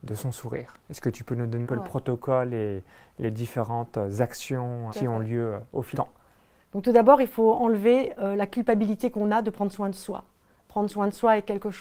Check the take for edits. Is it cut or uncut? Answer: cut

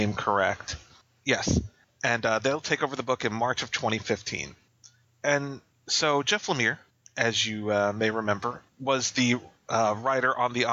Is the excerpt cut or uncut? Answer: uncut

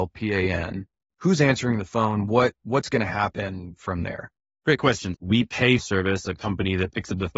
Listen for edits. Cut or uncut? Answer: cut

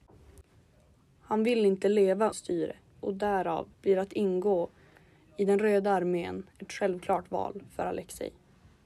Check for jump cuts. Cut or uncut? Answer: cut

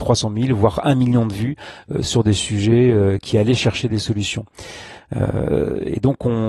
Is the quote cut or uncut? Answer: uncut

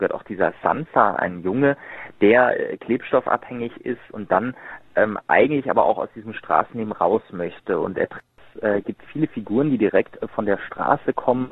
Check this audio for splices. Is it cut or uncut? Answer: uncut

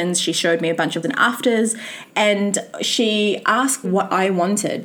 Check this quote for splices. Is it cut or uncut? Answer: cut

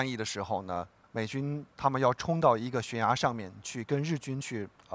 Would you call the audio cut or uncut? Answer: cut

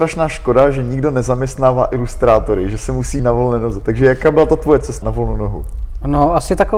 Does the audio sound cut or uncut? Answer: cut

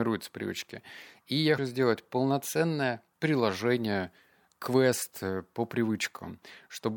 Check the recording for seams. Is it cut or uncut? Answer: cut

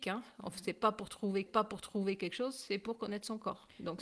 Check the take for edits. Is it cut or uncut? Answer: cut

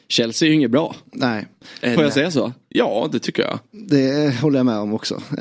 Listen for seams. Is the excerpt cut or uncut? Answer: uncut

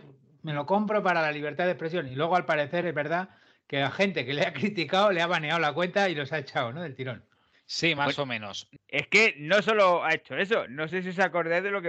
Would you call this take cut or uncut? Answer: uncut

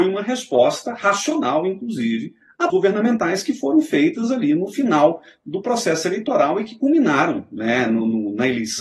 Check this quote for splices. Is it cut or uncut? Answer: cut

